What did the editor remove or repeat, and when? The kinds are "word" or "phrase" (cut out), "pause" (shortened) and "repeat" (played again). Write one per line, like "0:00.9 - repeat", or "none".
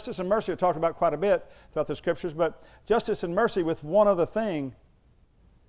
none